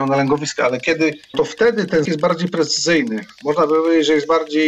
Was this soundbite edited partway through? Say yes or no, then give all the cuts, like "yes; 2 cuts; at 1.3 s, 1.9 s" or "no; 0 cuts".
yes; 2 cuts; at 1.3 s, 2.0 s